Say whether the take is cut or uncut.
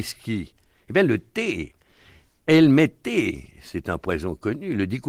uncut